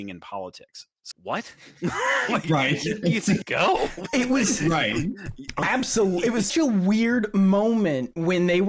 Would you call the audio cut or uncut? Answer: cut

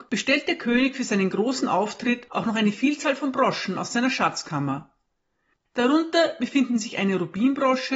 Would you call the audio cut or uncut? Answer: uncut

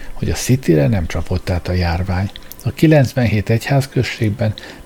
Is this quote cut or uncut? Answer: uncut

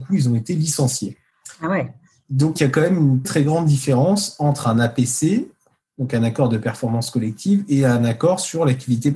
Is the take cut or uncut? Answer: cut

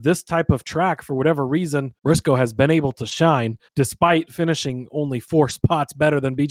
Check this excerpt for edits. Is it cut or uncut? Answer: cut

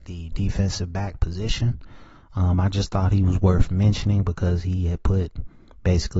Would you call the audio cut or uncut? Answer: uncut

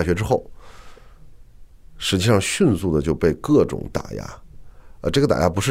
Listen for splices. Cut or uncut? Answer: uncut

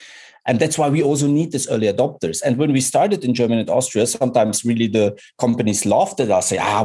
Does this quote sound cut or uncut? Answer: uncut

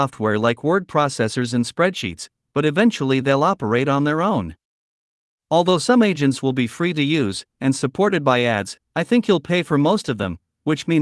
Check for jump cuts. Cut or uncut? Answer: uncut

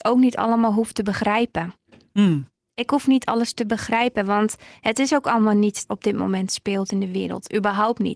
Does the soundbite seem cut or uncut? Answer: cut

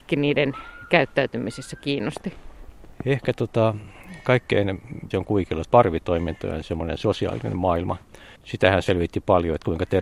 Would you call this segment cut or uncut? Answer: cut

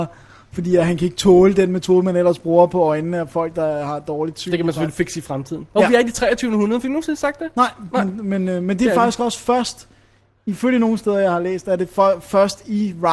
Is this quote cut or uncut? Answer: uncut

